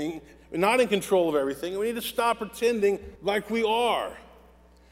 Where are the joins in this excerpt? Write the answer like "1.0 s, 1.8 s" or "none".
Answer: 3.2 s